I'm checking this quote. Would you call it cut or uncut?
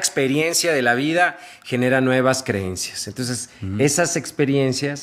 uncut